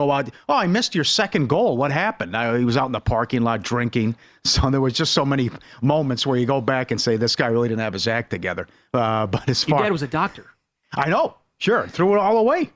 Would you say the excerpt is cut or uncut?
uncut